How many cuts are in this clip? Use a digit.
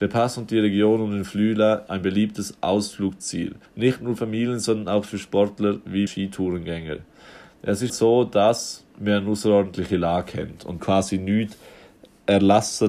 6